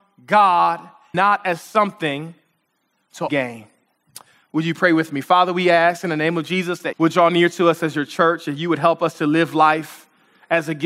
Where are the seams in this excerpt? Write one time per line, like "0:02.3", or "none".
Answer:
0:01.1
0:03.3
0:06.9